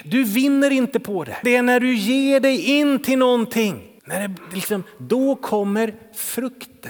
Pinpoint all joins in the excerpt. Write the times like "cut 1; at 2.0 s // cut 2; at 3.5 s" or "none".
cut 1; at 1.4 s // cut 2; at 4.0 s